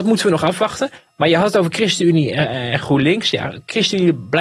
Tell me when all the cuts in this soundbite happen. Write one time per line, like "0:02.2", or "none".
none